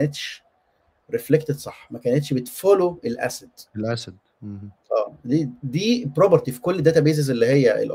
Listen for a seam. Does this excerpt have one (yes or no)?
no